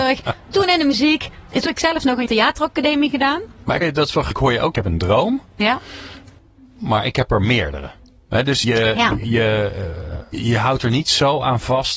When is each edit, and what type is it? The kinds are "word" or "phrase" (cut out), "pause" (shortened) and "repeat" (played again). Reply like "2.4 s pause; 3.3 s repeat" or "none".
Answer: 1.7 s word; 2.3 s word; 3.8 s word; 4.3 s word; 4.7 s word; 8.6 s word; 10.3 s word